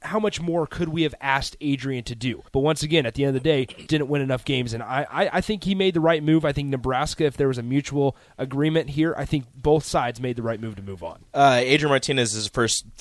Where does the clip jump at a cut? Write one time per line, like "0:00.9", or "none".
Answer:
0:02.5
0:03.9